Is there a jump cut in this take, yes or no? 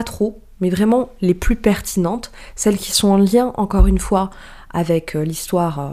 no